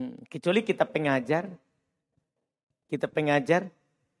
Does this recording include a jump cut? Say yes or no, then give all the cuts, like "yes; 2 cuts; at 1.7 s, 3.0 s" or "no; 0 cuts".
no; 0 cuts